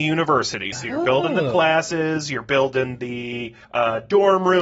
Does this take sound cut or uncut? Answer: cut